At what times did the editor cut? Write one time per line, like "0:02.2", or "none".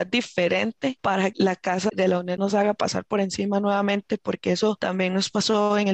0:01.3
0:01.9
0:02.4